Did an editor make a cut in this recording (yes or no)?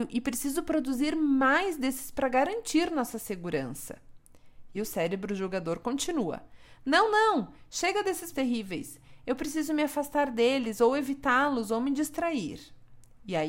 yes